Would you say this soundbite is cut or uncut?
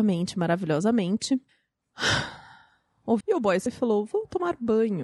cut